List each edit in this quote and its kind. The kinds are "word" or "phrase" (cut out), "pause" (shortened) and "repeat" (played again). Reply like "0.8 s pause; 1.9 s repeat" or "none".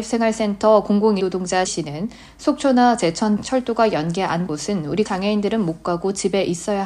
1.2 s word; 1.7 s word; 3.4 s word; 4.5 s word; 5.1 s word

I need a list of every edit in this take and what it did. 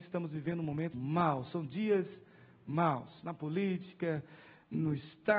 0.9 s word

